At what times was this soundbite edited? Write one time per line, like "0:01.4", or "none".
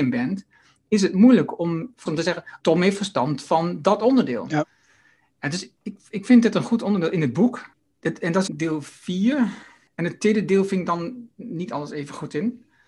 0:02.1
0:02.6
0:05.8
0:08.5